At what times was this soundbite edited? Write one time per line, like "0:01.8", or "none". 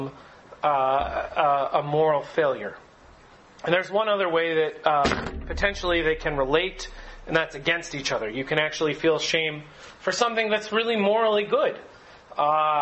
none